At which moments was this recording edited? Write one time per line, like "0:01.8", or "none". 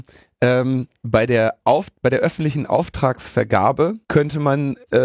0:04.0